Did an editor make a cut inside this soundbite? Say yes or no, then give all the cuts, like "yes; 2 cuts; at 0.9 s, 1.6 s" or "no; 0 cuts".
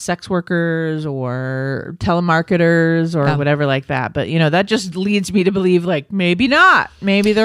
no; 0 cuts